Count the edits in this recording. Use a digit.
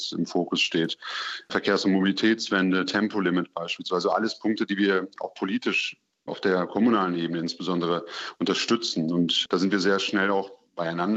0